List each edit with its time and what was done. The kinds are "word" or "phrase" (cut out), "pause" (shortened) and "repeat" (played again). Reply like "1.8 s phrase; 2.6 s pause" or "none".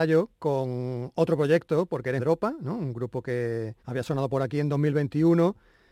2.2 s phrase; 3.8 s pause